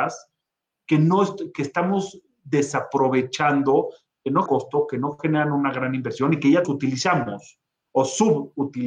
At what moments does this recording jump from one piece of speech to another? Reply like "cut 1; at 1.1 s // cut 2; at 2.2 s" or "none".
cut 1; at 4.5 s // cut 2; at 6.6 s